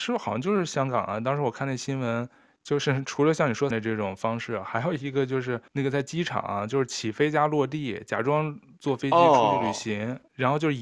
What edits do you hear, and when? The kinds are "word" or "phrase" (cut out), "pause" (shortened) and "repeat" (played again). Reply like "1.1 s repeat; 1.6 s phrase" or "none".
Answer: 3.7 s word; 5.7 s pause